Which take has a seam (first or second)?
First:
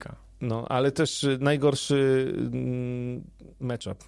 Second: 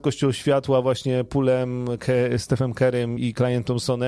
second